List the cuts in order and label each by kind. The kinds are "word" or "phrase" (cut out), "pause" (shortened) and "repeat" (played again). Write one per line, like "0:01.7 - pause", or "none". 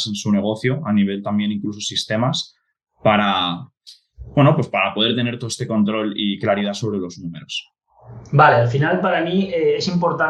none